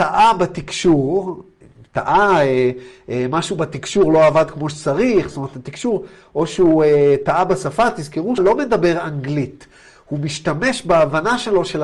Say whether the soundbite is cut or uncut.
cut